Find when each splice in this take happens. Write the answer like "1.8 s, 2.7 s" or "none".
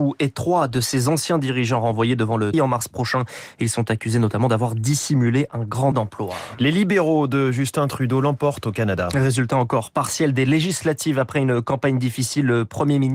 2.5 s, 5.9 s